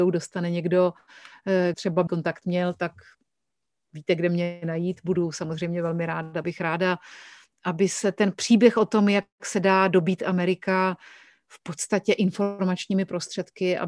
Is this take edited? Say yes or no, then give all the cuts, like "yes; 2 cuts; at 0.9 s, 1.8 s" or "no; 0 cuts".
yes; 3 cuts; at 1.7 s, 2.1 s, 6.4 s